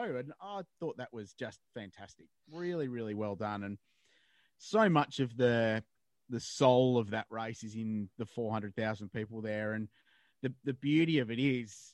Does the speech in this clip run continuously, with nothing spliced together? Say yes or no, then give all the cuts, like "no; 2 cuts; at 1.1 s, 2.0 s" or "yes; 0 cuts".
yes; 0 cuts